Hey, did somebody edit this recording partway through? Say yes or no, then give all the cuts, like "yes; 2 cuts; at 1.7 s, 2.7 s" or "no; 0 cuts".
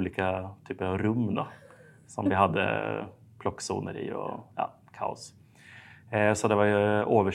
no; 0 cuts